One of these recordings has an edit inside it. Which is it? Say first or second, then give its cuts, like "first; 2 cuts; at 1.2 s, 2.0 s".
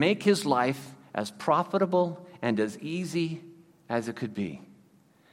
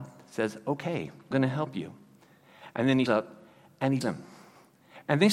second; 3 cuts; at 1.3 s, 3.1 s, 4.0 s